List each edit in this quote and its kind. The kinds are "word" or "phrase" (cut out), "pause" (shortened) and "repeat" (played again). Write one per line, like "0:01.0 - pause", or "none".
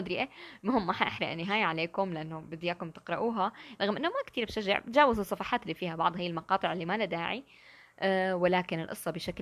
none